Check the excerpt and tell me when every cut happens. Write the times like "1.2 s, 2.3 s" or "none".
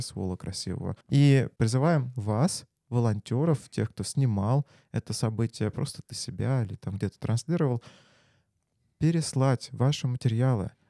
1.0 s